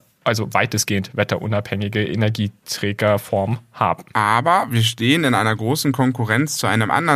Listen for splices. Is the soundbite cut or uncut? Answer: cut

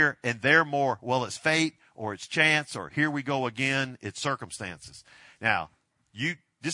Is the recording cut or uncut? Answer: uncut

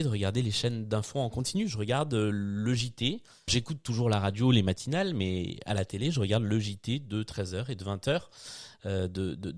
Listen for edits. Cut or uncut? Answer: cut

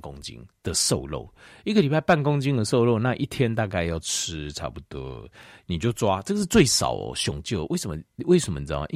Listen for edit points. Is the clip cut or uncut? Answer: uncut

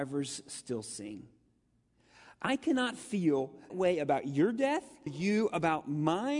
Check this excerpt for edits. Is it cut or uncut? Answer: cut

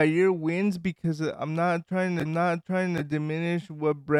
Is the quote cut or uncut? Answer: cut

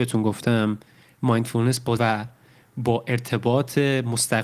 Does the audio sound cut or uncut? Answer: cut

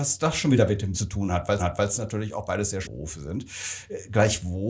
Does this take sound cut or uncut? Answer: cut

